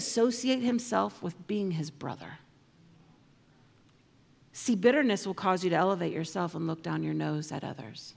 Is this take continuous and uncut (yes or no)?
yes